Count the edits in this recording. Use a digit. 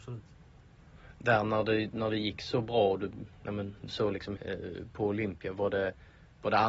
2